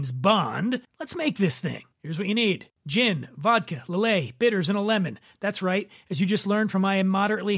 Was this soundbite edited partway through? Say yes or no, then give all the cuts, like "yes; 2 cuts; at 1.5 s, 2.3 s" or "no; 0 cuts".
yes; 1 cut; at 1.9 s